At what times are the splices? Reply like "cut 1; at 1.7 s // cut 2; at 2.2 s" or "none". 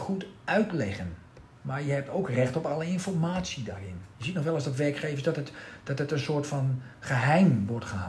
cut 1; at 4.1 s // cut 2; at 6.9 s